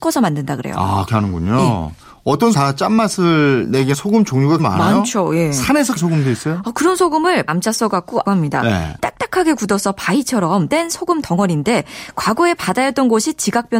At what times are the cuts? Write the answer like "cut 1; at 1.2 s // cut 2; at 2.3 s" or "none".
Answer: cut 1; at 1.1 s // cut 2; at 2.5 s // cut 3; at 3.9 s // cut 4; at 4.6 s // cut 5; at 6.0 s // cut 6; at 7.5 s // cut 7; at 8.2 s // cut 8; at 9.0 s // cut 9; at 10.7 s